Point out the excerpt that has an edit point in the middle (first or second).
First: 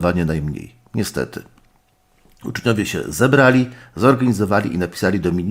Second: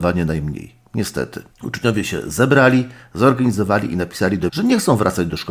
second